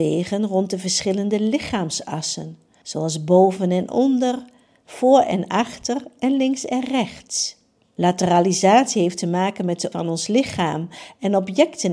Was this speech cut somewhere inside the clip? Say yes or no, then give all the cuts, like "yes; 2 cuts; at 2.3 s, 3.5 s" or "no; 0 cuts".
yes; 1 cut; at 9.9 s